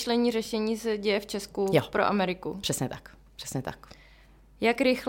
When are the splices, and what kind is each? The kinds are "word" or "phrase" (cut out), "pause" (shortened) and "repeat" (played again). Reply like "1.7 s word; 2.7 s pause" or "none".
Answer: none

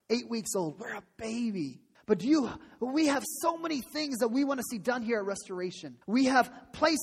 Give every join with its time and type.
1.9 s pause; 6.0 s pause

